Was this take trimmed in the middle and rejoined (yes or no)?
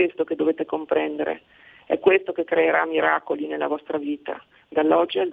no